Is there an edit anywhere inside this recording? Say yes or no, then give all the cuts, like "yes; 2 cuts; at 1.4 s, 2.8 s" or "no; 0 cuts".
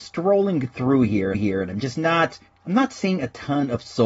yes; 2 cuts; at 1.3 s, 2.5 s